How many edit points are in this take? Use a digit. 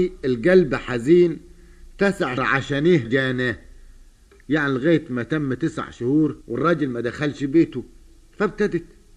3